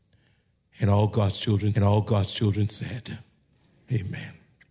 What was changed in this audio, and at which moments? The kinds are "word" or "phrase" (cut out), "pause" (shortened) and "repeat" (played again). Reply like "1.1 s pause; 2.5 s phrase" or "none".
1.8 s repeat